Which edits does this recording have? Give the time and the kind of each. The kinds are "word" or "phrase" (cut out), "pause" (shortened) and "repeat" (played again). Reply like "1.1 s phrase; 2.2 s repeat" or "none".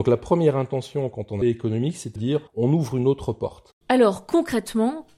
1.4 s phrase; 2.2 s word; 2.5 s pause; 3.8 s pause